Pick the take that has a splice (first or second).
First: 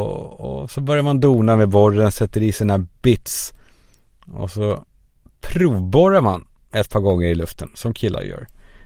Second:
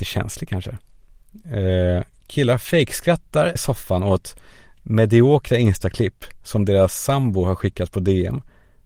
second